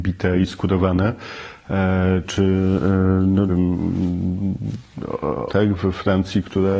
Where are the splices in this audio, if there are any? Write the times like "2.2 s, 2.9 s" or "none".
2.2 s, 3.5 s, 5.5 s